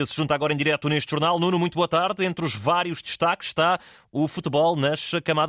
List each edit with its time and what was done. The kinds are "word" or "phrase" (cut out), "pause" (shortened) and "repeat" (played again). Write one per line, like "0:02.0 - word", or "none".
none